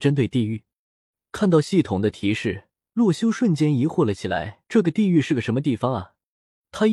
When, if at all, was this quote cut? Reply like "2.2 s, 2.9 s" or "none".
2.7 s, 4.7 s

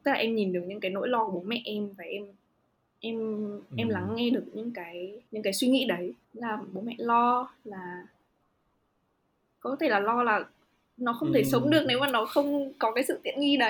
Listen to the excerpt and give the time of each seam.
2.5 s, 5.3 s, 6.2 s

